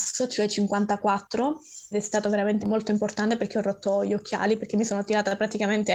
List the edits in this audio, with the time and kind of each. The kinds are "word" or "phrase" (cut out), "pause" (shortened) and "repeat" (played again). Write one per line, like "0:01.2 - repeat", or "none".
0:01.9 - word
0:02.6 - word